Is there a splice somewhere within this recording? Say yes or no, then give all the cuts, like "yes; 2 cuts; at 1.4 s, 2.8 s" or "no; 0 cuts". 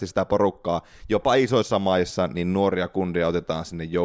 no; 0 cuts